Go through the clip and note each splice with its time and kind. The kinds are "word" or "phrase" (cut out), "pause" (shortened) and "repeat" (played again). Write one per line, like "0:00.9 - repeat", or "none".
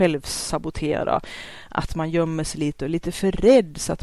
none